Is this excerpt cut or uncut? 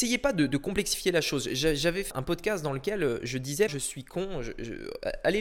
cut